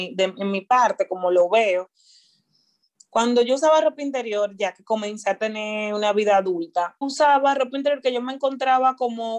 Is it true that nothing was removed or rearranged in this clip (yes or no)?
no